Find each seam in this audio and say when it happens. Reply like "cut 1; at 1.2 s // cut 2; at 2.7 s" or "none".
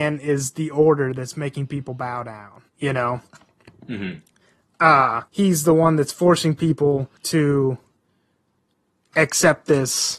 cut 1; at 2.7 s // cut 2; at 5.3 s // cut 3; at 7.2 s